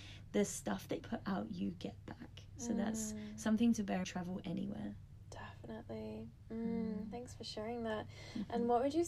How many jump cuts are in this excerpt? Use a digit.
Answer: 2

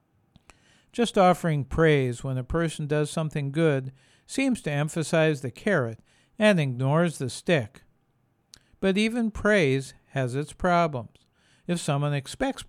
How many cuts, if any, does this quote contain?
0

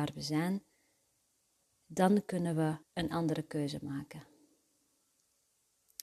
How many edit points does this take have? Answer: 1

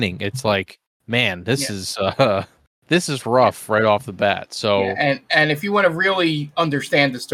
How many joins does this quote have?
0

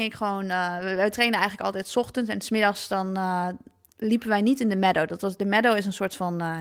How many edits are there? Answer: 0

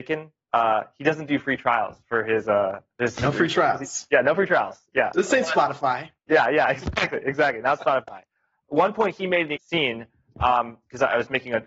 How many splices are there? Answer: 2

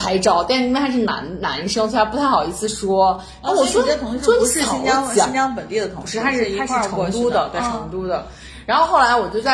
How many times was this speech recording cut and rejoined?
1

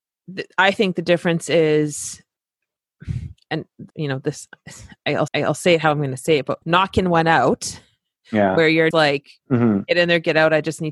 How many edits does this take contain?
5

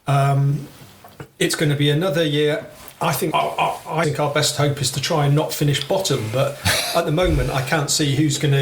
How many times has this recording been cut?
2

